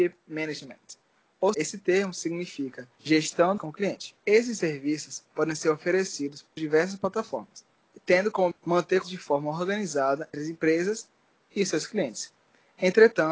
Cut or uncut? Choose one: cut